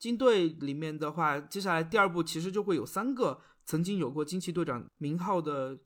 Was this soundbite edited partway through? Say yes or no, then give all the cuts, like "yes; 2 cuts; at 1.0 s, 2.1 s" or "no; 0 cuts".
no; 0 cuts